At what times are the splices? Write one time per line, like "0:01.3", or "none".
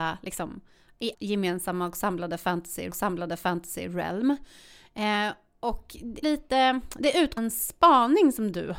0:01.1
0:02.9
0:06.2
0:07.4